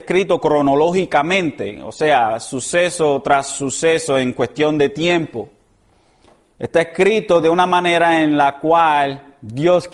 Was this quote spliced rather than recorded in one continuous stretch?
no; 0 cuts

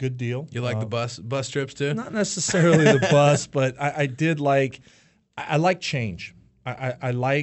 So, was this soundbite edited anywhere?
no; 0 cuts

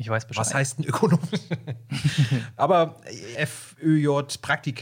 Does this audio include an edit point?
yes; 1 cut; at 3.3 s

